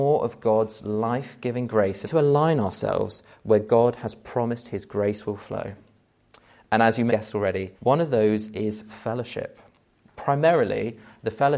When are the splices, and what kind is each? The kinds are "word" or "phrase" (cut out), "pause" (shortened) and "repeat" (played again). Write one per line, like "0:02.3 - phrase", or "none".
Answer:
0:02.0 - phrase
0:07.1 - word
0:07.7 - pause